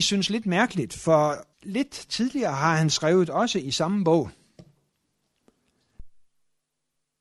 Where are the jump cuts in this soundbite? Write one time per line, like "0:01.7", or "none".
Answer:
0:01.5